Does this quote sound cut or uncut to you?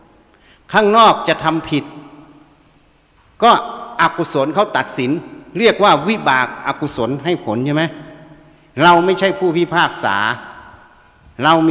uncut